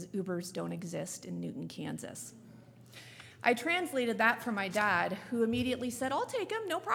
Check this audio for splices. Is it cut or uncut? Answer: uncut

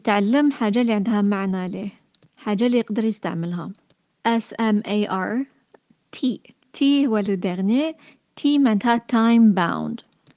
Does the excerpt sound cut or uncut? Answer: uncut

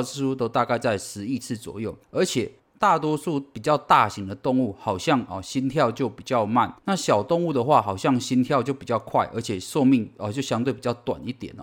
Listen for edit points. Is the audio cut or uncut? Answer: cut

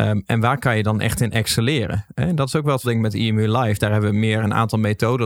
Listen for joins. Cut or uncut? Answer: cut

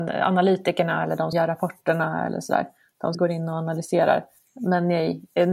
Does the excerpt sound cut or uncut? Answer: cut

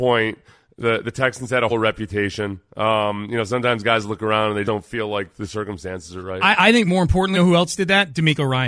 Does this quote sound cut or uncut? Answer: cut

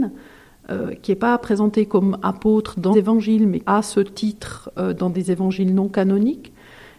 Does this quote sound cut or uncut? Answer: cut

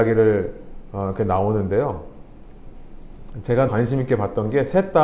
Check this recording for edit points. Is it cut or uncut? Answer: cut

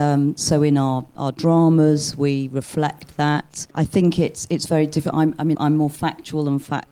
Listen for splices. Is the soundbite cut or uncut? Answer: cut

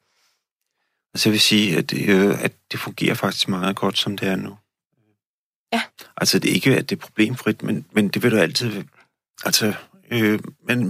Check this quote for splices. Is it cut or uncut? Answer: uncut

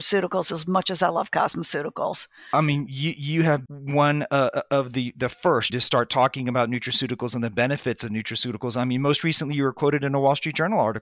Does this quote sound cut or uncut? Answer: cut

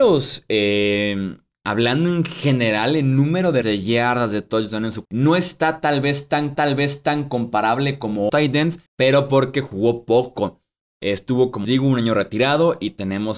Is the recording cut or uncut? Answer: cut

